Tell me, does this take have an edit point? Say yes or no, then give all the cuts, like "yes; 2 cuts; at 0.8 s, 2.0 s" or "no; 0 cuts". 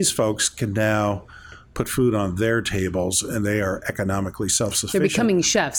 no; 0 cuts